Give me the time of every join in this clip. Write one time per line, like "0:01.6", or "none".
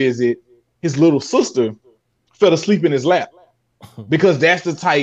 none